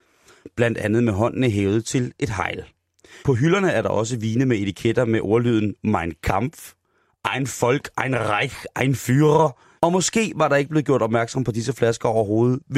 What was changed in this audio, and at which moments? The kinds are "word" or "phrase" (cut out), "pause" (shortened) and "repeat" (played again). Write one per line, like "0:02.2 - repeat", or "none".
0:03.2 - pause
0:09.8 - pause